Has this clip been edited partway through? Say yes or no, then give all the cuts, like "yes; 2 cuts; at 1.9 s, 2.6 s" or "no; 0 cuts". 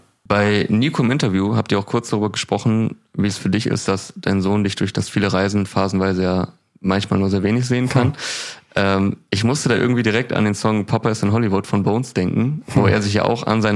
no; 0 cuts